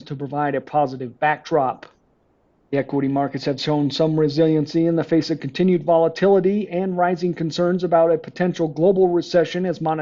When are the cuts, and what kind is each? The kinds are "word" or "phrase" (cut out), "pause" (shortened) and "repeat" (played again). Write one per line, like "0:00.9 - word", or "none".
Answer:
none